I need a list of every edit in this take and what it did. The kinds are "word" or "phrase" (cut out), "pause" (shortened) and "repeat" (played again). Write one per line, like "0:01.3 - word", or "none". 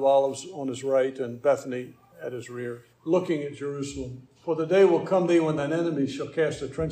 0:02.9 - pause
0:04.4 - pause